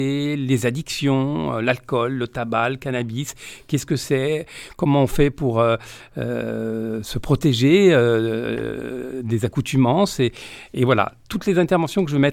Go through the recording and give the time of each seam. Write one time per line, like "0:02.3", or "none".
none